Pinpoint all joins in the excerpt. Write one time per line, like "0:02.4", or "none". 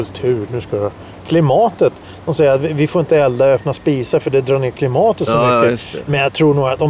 none